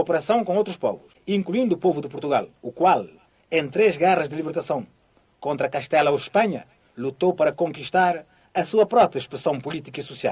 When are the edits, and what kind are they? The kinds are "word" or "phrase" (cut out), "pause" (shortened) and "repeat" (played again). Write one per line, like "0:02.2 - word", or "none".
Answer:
0:02.6 - pause